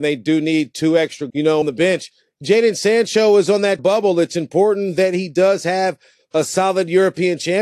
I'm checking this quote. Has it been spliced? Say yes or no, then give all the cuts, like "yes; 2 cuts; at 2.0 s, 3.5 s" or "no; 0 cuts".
yes; 3 cuts; at 1.3 s, 1.6 s, 3.8 s